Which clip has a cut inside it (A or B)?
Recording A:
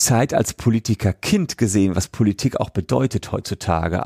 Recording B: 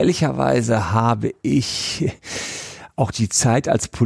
B